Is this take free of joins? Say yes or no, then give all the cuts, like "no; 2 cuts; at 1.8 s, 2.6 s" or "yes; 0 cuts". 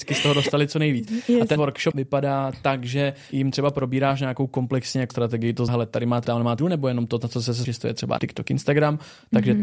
no; 9 cuts; at 1.6 s, 1.9 s, 3.3 s, 5.1 s, 5.7 s, 6.2 s, 6.6 s, 7.6 s, 8.2 s